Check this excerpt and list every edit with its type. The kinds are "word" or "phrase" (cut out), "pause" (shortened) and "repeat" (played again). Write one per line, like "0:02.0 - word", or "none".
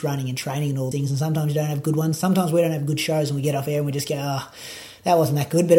0:00.9 - word